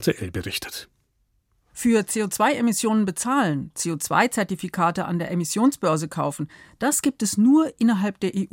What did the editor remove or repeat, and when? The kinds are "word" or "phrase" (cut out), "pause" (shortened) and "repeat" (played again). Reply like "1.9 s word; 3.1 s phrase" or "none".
none